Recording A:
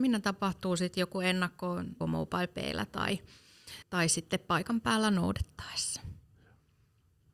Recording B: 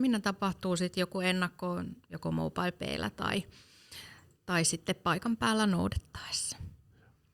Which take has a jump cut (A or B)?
A